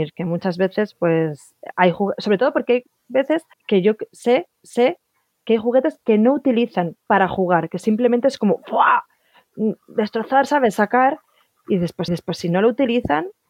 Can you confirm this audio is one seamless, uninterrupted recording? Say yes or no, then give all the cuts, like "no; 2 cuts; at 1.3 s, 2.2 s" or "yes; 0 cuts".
no; 3 cuts; at 3.5 s, 4.6 s, 12.1 s